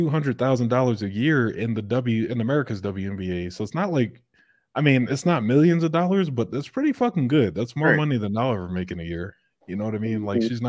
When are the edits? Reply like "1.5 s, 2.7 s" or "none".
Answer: none